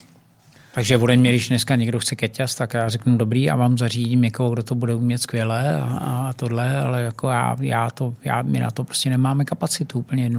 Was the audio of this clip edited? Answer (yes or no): no